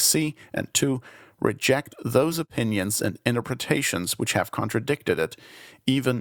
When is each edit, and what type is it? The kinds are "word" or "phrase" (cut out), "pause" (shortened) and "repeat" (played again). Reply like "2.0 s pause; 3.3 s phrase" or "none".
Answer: none